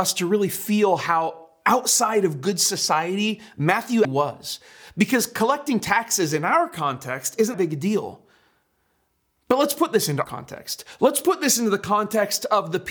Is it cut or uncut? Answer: cut